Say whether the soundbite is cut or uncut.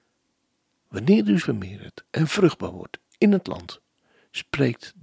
cut